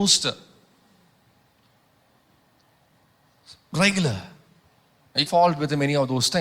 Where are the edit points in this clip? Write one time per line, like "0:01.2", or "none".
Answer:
0:05.3